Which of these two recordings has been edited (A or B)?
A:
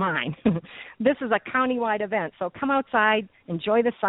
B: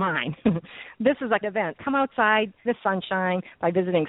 B